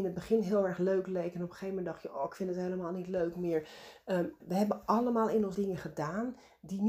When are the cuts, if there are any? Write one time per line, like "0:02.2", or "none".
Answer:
0:04.4
0:05.5

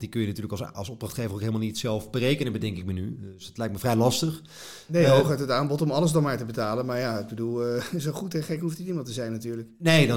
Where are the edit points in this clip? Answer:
none

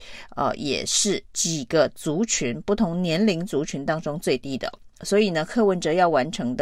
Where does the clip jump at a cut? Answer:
0:01.3

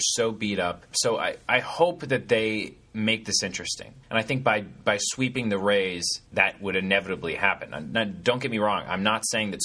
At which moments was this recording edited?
0:04.0
0:06.3

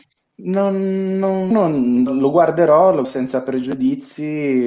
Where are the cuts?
0:01.5
0:02.1
0:03.0

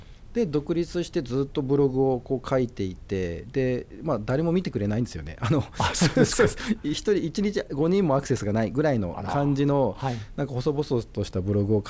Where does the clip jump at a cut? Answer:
none

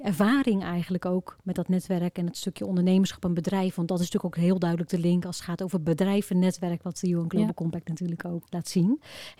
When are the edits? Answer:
0:08.4

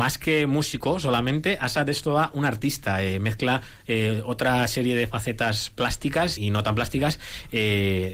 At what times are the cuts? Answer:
0:06.4

